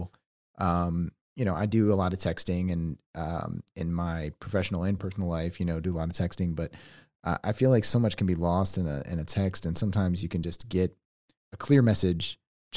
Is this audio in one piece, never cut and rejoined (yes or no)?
yes